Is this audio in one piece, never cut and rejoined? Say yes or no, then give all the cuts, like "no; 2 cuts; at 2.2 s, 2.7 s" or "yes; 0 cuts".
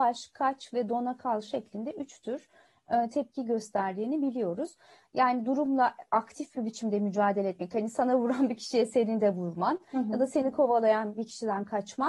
yes; 0 cuts